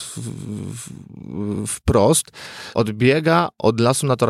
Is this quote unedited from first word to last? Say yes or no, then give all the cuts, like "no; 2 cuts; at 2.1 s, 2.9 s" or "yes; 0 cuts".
no; 1 cut; at 2.7 s